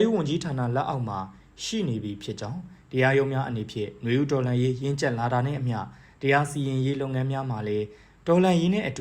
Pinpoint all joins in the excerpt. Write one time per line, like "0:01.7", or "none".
none